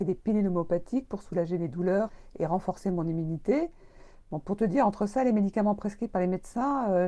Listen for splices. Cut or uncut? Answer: uncut